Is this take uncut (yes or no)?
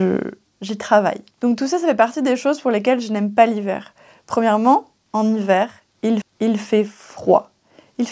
no